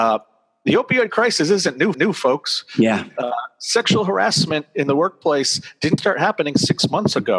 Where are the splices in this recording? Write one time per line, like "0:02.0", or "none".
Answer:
0:01.9
0:06.0